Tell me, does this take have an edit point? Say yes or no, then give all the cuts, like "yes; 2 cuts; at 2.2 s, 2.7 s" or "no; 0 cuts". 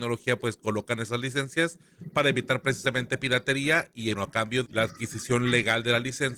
yes; 2 cuts; at 4.1 s, 4.6 s